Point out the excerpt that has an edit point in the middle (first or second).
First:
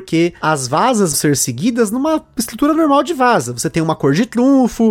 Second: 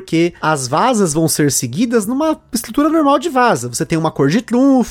first